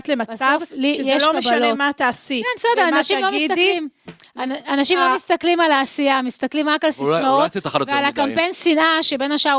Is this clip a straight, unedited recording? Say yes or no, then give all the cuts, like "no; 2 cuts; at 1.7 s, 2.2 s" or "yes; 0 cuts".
no; 1 cut; at 7.6 s